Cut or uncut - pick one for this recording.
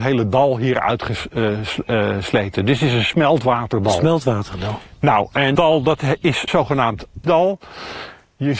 cut